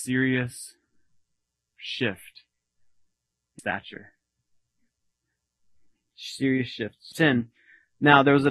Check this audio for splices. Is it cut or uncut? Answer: cut